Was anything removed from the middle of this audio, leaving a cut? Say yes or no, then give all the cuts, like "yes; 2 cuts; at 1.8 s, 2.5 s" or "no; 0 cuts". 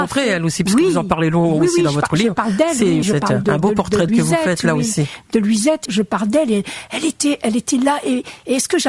yes; 4 cuts; at 3.0 s, 3.4 s, 4.1 s, 5.9 s